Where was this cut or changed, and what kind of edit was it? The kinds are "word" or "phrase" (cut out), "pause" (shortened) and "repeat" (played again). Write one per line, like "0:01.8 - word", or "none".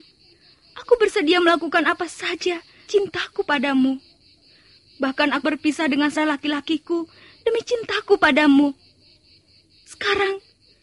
0:02.9 - word
0:05.4 - word
0:06.2 - word